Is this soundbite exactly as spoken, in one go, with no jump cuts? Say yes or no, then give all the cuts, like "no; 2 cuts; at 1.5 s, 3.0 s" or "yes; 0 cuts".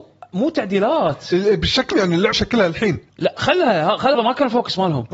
no; 4 cuts; at 1.9 s, 2.3 s, 3.1 s, 4.1 s